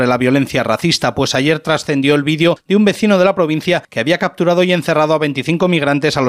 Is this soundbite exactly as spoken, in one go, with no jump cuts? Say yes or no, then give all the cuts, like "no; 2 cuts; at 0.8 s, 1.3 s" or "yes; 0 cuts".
yes; 0 cuts